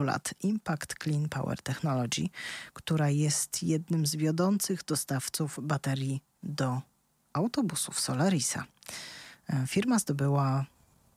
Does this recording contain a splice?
no; 0 cuts

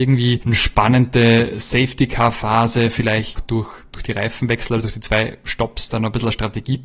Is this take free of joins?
no; 1 cut; at 3.4 s

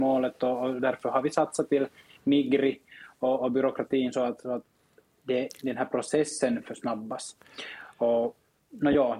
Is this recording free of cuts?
yes; 0 cuts

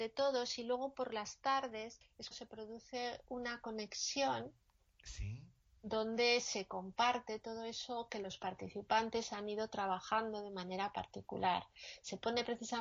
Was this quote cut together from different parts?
yes; 1 cut; at 2.3 s

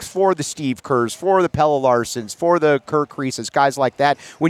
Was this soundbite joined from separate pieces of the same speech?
no; 0 cuts

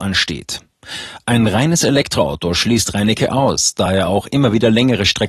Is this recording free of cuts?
yes; 0 cuts

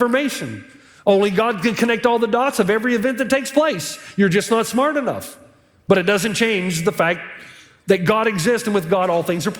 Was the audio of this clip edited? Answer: no; 0 cuts

